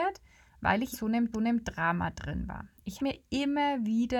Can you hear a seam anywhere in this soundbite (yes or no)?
yes